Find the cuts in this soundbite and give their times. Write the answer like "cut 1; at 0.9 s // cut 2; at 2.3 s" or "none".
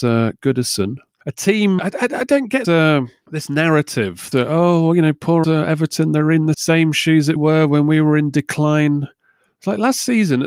cut 1; at 1.8 s // cut 2; at 2.6 s // cut 3; at 4.3 s // cut 4; at 5.4 s // cut 5; at 6.5 s // cut 6; at 7.4 s